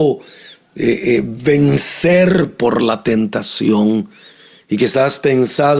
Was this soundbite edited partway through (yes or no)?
no